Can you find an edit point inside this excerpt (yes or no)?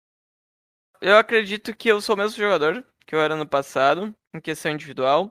no